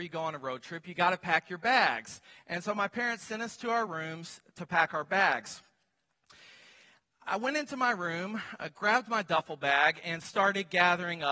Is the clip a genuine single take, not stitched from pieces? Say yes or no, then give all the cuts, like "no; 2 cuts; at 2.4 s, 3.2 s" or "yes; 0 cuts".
yes; 0 cuts